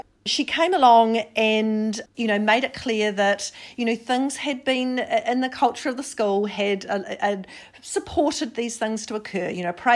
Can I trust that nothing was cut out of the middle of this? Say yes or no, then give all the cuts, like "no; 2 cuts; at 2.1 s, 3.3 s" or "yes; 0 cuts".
no; 1 cut; at 2.1 s